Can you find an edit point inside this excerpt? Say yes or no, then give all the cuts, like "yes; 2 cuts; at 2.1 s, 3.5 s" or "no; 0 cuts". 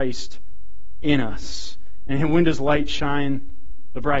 no; 0 cuts